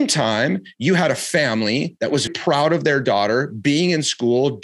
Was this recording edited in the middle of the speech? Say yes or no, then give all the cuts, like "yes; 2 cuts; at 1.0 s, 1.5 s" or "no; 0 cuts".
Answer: yes; 1 cut; at 2.3 s